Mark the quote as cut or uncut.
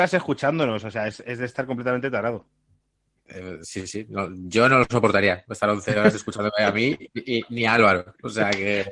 uncut